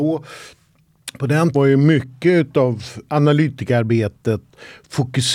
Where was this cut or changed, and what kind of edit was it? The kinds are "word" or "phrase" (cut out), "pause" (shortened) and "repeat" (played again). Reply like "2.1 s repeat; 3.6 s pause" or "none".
1.5 s word